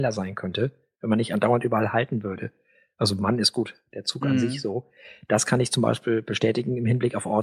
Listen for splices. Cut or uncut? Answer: uncut